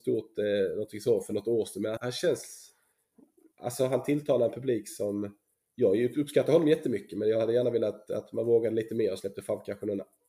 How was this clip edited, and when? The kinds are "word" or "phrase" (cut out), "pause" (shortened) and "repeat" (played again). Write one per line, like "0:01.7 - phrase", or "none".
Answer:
0:02.0 - word